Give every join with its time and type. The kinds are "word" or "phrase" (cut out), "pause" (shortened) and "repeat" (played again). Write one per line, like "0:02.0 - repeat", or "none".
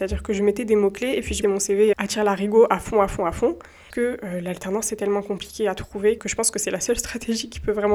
0:01.4 - word
0:01.9 - word
0:03.9 - word
0:06.2 - word